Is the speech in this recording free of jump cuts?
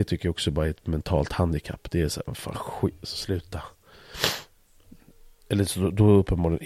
yes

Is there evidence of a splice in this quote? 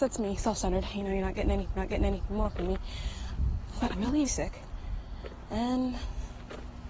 yes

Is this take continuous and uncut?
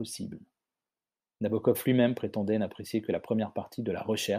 yes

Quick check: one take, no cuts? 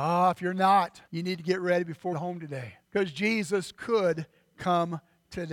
no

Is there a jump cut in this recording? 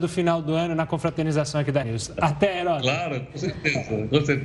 yes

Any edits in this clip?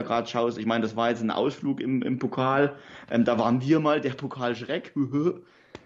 no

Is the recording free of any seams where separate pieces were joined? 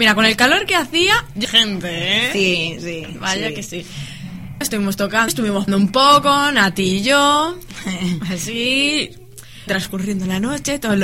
no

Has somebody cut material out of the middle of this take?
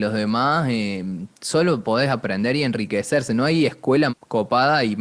yes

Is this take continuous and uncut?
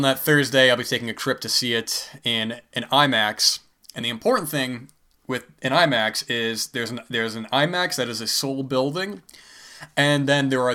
yes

